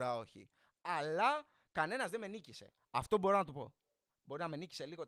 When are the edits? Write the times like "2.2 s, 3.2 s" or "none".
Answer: none